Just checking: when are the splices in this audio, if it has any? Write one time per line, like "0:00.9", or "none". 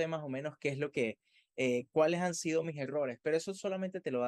none